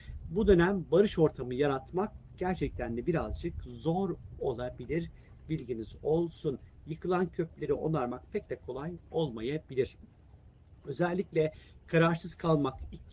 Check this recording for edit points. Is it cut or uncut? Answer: uncut